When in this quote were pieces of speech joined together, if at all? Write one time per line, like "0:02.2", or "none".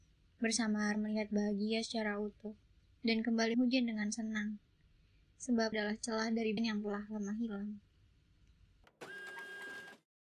0:00.9
0:02.8
0:03.5
0:05.7
0:06.6